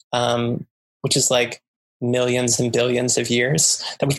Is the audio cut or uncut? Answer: cut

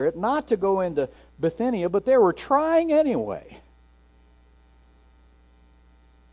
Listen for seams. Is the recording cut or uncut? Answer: uncut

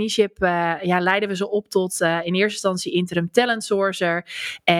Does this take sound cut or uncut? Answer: uncut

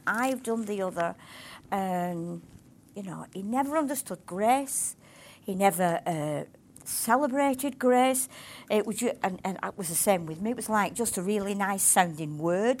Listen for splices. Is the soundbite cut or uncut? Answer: uncut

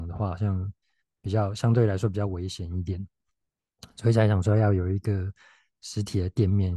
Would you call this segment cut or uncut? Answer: uncut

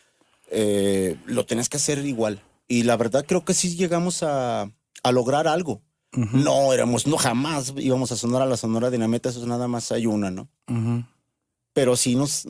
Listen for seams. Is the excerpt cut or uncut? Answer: uncut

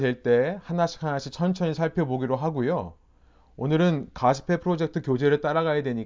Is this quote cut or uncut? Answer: uncut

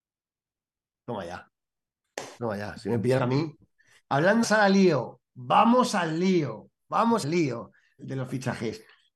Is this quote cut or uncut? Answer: cut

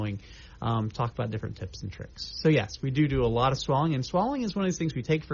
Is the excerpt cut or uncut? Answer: uncut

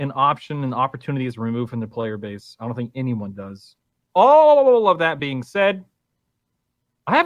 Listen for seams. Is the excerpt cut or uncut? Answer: uncut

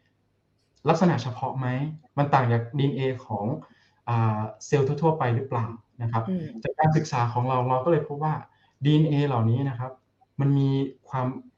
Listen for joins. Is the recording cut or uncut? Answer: uncut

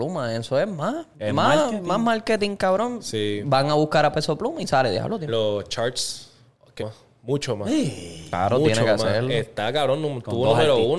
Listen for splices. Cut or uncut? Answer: cut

